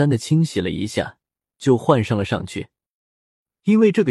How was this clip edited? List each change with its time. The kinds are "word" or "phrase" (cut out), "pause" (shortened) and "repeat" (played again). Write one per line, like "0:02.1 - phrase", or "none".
none